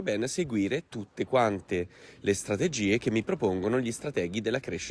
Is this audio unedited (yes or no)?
yes